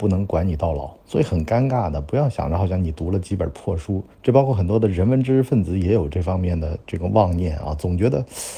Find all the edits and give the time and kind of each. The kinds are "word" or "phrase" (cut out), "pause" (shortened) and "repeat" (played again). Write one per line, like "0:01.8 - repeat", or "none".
0:01.0 - pause
0:04.1 - pause